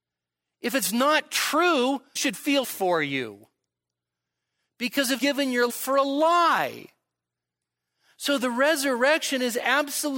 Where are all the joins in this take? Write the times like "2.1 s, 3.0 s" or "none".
2.2 s, 2.6 s, 5.2 s, 5.7 s